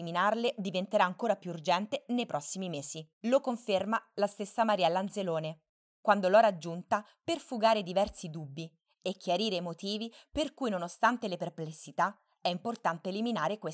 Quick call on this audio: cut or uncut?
cut